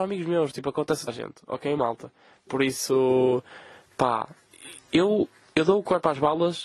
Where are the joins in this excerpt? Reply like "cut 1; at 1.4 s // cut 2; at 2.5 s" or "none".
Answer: cut 1; at 1.1 s